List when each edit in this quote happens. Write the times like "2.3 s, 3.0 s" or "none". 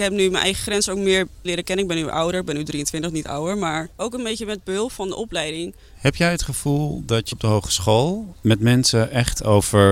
1.4 s, 7.3 s